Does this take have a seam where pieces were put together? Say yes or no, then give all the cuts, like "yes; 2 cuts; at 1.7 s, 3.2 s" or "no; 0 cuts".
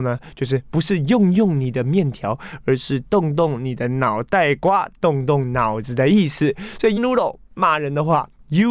yes; 1 cut; at 7.0 s